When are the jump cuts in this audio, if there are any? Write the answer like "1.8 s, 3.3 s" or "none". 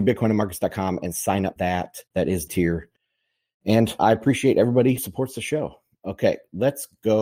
1.6 s, 2.1 s, 2.5 s, 4.0 s, 5.0 s